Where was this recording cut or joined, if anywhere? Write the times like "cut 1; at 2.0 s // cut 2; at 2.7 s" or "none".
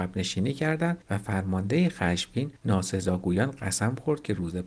cut 1; at 1.0 s // cut 2; at 2.6 s